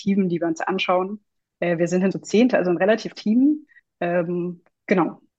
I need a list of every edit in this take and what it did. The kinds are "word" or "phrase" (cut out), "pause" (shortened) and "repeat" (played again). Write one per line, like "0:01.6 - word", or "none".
0:02.1 - word
0:03.1 - word